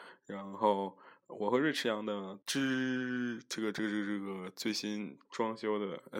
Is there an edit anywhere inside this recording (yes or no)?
yes